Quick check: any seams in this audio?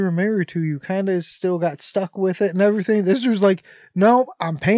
no; 0 cuts

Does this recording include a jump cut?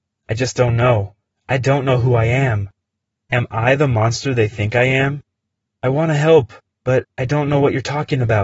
no; 0 cuts

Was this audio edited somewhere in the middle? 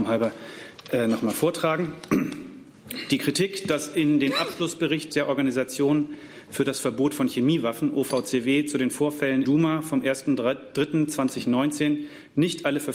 yes; 1 cut; at 9.4 s

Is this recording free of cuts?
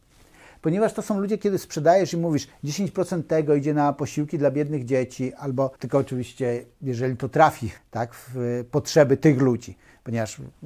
no; 2 cuts; at 5.8 s, 7.8 s

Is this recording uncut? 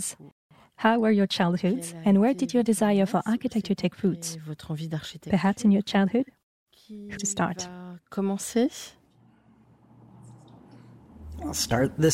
no; 1 cut; at 7.2 s

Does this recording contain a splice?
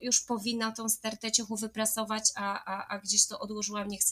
no; 0 cuts

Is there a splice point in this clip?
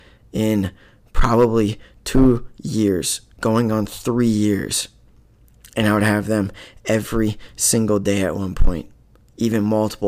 no; 0 cuts

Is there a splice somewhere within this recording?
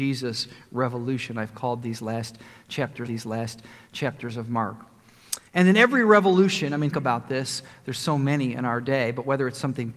yes; 3 cuts; at 3.1 s, 5.5 s, 6.9 s

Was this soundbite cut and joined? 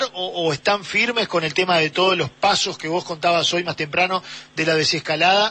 yes; 1 cut; at 2.4 s

